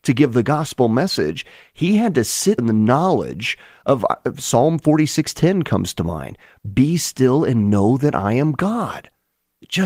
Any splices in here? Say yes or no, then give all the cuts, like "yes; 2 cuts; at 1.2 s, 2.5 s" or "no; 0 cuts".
yes; 1 cut; at 2.6 s